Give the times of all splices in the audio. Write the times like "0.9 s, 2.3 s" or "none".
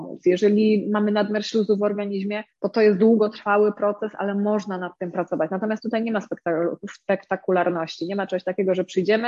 2.5 s